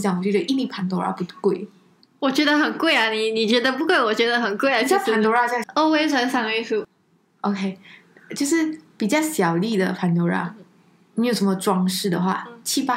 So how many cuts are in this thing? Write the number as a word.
two